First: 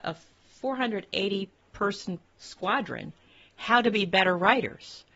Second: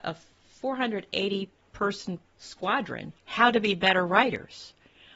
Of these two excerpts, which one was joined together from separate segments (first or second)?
second